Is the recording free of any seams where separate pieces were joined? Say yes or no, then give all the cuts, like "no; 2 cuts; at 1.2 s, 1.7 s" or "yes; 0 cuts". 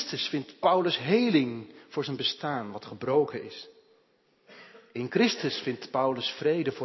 yes; 0 cuts